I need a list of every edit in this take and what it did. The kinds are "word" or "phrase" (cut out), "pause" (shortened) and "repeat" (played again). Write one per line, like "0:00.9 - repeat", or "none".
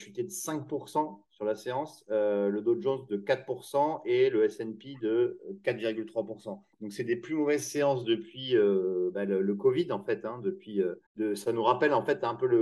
0:06.7 - pause
0:11.1 - pause